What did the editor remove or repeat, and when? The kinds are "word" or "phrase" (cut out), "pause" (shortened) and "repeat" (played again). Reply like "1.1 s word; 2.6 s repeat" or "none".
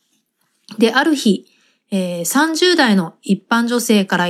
none